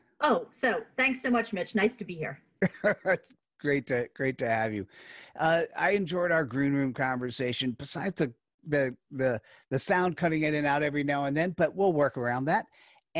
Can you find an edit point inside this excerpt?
no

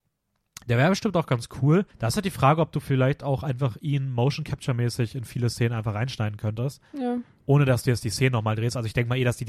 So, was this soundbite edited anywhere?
yes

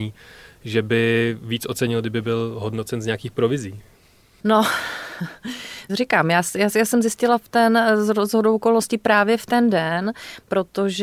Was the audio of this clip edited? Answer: no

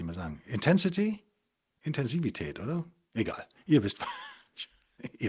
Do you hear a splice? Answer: no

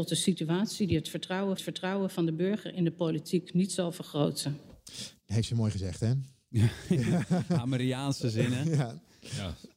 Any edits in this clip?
yes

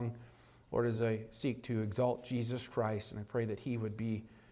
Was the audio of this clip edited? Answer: no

